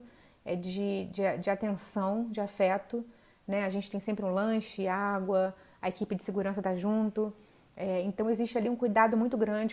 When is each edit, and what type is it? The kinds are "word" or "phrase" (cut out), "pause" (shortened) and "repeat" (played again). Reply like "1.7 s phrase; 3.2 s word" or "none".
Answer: none